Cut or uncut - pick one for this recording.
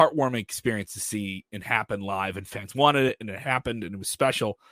uncut